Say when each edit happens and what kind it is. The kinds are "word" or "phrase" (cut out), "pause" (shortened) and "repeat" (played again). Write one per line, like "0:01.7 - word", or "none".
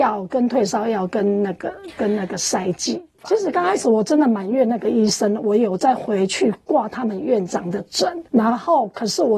0:08.3 - pause